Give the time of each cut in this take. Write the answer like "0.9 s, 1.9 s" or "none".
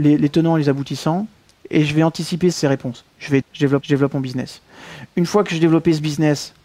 2.5 s, 3.4 s, 3.8 s